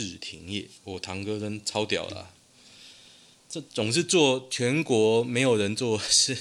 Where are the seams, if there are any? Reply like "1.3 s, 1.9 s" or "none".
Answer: none